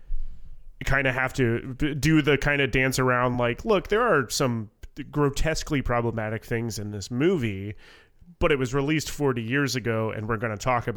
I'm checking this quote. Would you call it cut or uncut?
uncut